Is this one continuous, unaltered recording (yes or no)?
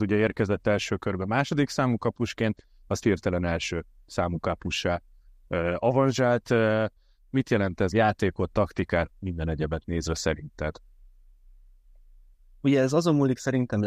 no